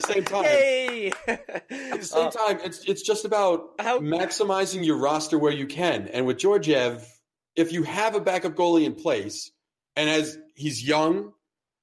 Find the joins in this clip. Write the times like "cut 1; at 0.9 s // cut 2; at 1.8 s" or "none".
none